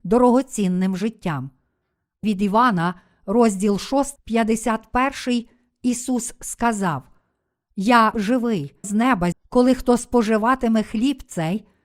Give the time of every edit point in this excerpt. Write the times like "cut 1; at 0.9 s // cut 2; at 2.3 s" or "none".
cut 1; at 2.2 s // cut 2; at 4.2 s // cut 3; at 8.1 s // cut 4; at 8.8 s // cut 5; at 9.3 s